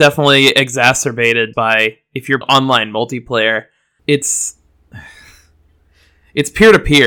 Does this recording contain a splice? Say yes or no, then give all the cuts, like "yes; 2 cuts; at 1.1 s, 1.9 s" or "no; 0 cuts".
yes; 3 cuts; at 1.5 s, 2.4 s, 4.0 s